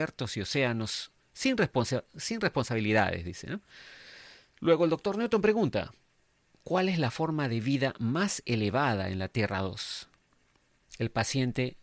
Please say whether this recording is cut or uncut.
uncut